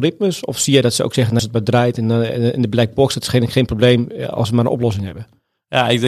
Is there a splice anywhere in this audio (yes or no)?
yes